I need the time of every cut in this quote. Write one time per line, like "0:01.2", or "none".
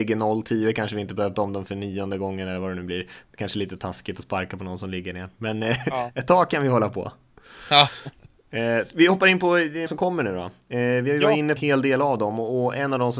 0:01.3
0:03.3
0:09.9
0:11.6